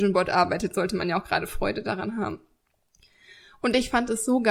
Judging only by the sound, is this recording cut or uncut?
uncut